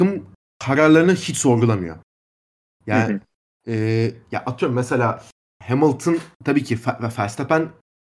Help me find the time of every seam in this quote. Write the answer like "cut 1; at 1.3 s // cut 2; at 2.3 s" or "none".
none